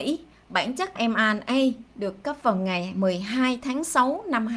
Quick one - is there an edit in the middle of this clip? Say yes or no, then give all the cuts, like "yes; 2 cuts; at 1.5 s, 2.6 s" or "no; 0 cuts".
yes; 2 cuts; at 1.0 s, 2.4 s